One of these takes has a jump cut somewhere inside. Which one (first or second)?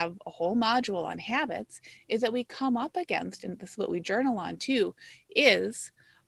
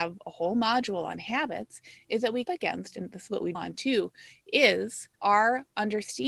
second